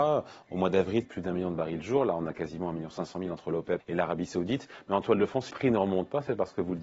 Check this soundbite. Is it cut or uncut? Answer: cut